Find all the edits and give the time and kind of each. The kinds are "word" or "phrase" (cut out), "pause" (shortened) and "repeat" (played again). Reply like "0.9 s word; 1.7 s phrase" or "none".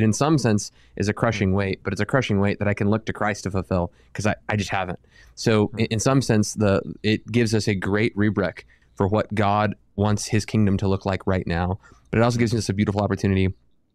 none